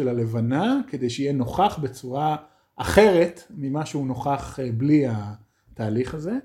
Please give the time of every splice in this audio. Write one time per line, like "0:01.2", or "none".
none